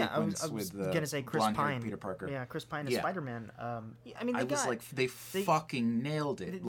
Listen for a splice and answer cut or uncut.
uncut